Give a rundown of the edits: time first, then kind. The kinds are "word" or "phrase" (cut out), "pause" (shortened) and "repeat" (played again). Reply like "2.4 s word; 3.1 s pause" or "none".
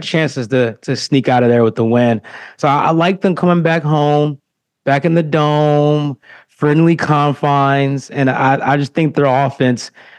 none